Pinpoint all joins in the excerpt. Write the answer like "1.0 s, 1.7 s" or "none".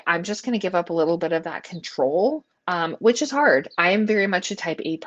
2.5 s